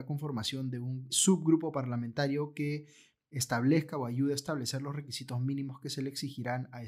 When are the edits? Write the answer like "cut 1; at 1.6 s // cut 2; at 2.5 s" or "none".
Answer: cut 1; at 1.1 s // cut 2; at 3.3 s